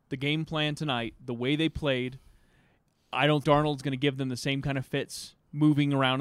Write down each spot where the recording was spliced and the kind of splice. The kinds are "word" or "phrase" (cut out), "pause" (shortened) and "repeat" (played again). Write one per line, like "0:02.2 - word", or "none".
0:03.4 - word